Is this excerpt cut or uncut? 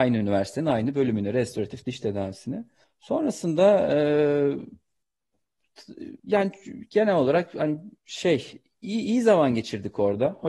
cut